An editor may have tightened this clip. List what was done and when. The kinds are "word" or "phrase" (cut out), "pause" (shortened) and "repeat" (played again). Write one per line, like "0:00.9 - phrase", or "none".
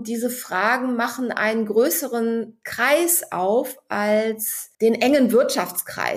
0:04.7 - pause